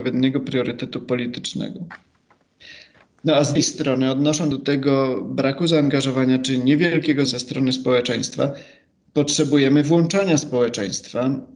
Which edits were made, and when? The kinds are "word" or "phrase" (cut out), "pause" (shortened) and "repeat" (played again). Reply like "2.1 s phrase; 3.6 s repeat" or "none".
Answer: 3.6 s word; 4.5 s word; 7.3 s word